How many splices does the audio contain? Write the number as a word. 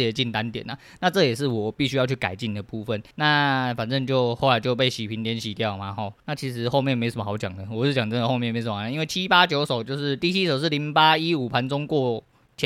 two